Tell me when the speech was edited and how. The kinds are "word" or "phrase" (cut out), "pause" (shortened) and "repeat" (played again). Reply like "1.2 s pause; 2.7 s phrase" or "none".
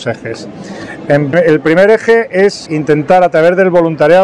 1.3 s word; 2.7 s word